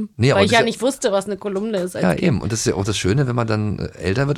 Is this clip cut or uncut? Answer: uncut